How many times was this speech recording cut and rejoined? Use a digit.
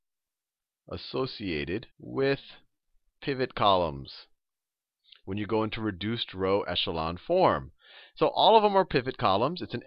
1